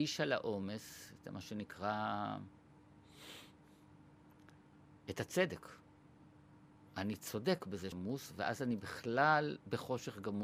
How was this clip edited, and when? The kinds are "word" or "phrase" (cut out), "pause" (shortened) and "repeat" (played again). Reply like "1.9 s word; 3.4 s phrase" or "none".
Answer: 7.9 s word